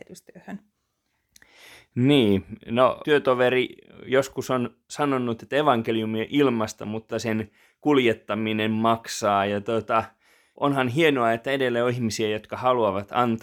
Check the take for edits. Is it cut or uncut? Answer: uncut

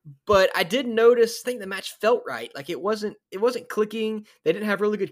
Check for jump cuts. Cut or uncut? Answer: cut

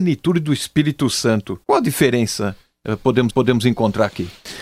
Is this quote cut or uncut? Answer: cut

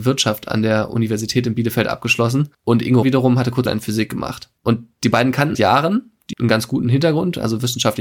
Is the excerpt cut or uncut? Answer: cut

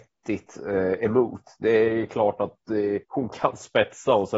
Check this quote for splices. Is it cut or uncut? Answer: cut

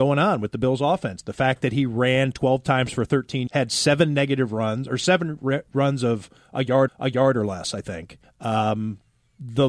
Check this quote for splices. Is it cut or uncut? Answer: cut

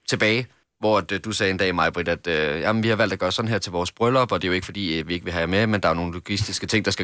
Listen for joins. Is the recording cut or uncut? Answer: uncut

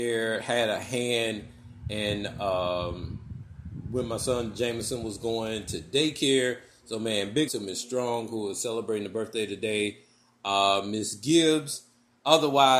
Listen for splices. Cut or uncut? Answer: cut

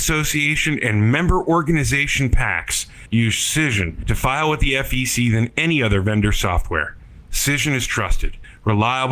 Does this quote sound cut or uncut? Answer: uncut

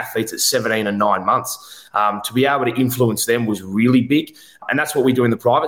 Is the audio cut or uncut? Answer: uncut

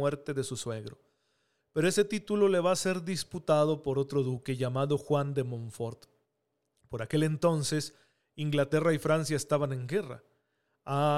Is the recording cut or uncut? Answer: uncut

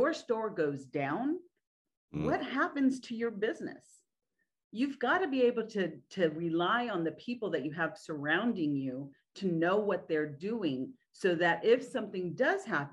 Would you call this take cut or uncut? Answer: uncut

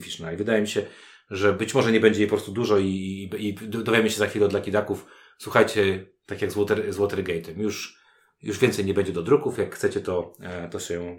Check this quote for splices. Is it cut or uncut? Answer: uncut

